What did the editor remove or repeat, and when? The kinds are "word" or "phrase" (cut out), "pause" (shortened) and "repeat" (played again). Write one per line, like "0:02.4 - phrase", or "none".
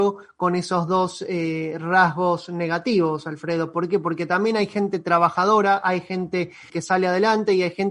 0:06.7 - word